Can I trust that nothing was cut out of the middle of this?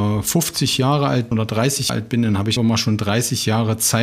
no; 3 cuts; at 1.3 s, 1.9 s, 2.6 s

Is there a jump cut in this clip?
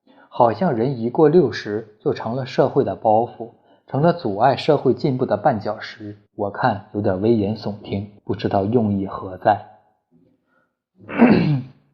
yes; 2 cuts; at 6.3 s, 8.2 s

